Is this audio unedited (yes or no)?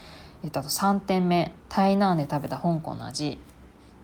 no